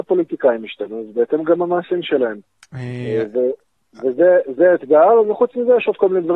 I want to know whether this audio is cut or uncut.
cut